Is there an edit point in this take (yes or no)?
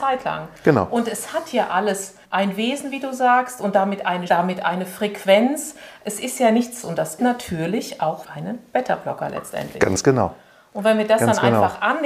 yes